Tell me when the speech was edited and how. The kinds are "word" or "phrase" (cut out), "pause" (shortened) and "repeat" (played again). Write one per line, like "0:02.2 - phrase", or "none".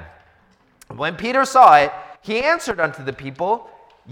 0:02.2 - pause